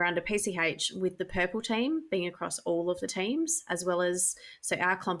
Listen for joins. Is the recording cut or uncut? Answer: uncut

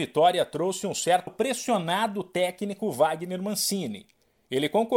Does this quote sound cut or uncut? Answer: cut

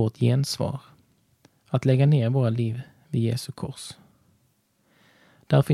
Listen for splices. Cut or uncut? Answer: uncut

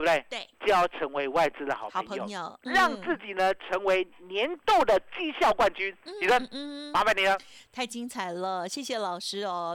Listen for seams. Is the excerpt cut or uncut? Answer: uncut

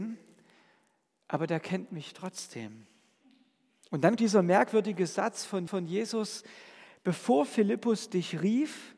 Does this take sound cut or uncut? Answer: cut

